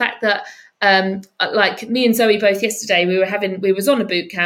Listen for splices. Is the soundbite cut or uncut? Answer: uncut